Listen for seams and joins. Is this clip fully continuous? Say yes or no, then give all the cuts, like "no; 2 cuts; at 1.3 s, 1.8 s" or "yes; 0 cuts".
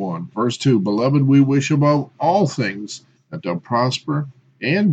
no; 1 cut; at 3.1 s